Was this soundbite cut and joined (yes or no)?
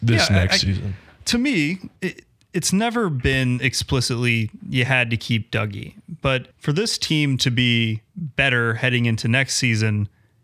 yes